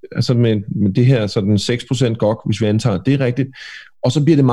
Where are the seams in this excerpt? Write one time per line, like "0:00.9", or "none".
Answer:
none